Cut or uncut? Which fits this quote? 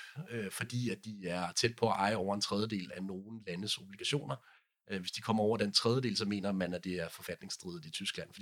uncut